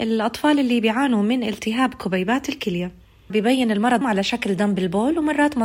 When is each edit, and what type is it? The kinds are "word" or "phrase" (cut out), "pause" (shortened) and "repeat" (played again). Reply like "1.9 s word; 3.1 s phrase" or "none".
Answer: 3.3 s phrase; 4.0 s word

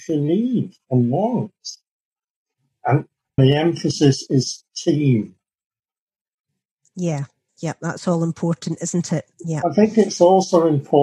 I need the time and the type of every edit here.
3.4 s word; 7.5 s pause; 9.3 s pause

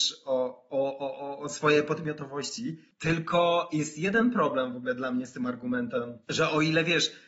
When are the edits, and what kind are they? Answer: 6.2 s pause

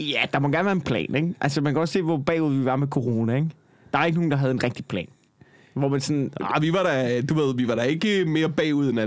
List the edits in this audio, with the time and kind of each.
none

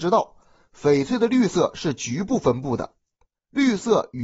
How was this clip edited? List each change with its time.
none

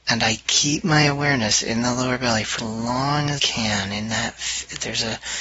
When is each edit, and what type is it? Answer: 2.6 s word; 3.4 s word

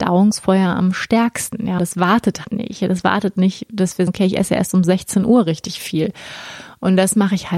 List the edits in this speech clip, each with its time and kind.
1.8 s word; 2.4 s word; 4.1 s word

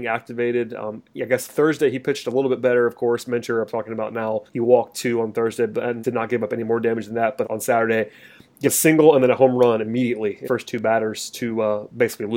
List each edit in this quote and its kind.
4.5 s pause; 6.0 s word; 7.4 s word; 8.6 s word; 10.4 s word

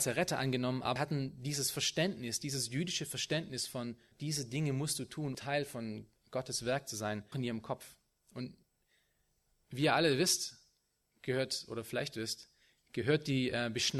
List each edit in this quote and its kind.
1.0 s word; 4.1 s word; 5.3 s word; 7.3 s word

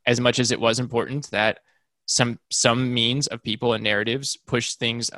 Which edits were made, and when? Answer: none

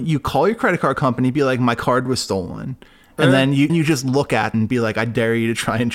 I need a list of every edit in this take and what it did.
3.7 s word; 4.5 s word

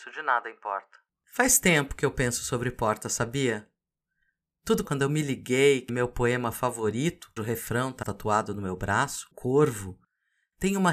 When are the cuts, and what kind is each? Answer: 1.1 s pause; 4.8 s word; 5.9 s word; 7.4 s word; 8.0 s word; 9.3 s word

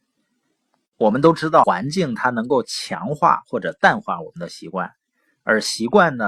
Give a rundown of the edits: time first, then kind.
1.6 s word

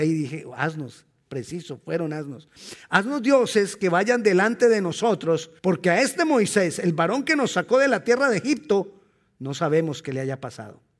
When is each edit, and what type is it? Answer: 5.6 s pause

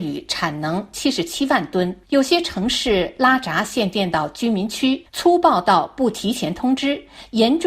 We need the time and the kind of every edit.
2.0 s pause; 5.1 s pause

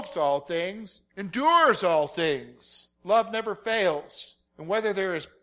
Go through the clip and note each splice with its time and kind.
1.1 s pause; 2.9 s pause; 4.5 s pause

